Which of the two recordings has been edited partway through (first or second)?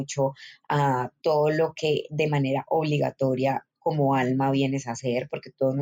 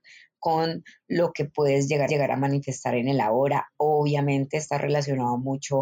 second